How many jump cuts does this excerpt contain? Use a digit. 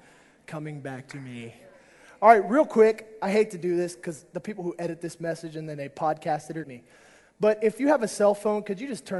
1